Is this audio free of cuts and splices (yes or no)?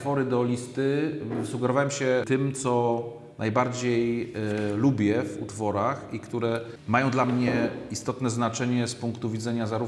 yes